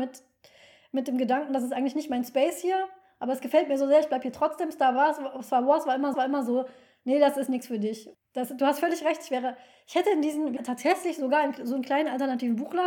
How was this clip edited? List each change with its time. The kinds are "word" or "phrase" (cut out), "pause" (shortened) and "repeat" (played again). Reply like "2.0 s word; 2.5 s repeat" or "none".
6.1 s repeat; 10.6 s phrase